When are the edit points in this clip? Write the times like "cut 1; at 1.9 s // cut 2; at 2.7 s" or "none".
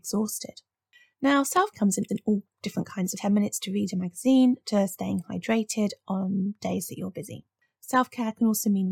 cut 1; at 1.7 s // cut 2; at 2.1 s // cut 3; at 3.2 s